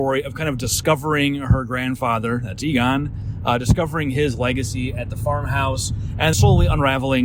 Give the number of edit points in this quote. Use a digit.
1